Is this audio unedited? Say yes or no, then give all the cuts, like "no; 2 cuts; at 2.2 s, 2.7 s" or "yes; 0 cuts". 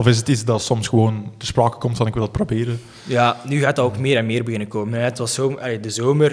yes; 0 cuts